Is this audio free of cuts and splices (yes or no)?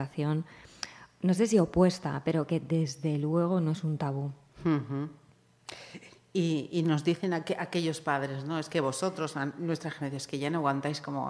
yes